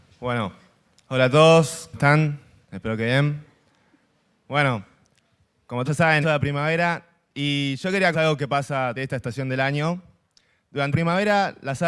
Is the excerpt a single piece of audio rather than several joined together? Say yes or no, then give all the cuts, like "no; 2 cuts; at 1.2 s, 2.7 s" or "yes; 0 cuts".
no; 6 cuts; at 1.9 s, 5.9 s, 6.2 s, 8.1 s, 9.0 s, 10.9 s